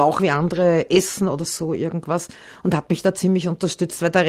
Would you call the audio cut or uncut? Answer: uncut